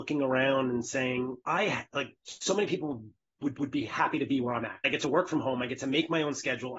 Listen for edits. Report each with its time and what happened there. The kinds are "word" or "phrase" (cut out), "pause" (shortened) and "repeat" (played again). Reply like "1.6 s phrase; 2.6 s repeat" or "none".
1.4 s pause; 3.5 s repeat

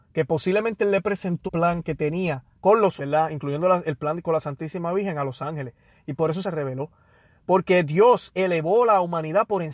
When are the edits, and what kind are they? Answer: 1.5 s word; 2.5 s pause; 3.0 s word; 6.4 s word

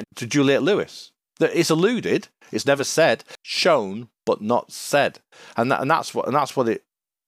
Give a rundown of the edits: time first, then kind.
none

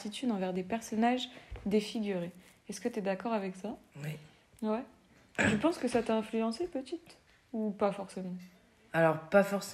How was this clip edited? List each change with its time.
none

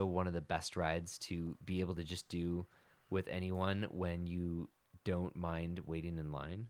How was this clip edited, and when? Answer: none

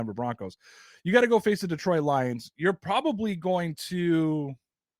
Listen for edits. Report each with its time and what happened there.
none

